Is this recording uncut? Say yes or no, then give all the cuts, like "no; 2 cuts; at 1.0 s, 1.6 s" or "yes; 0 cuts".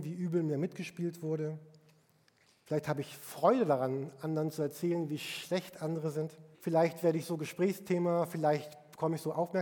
no; 1 cut; at 6.5 s